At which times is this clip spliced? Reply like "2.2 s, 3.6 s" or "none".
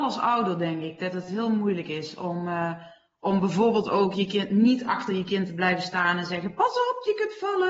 none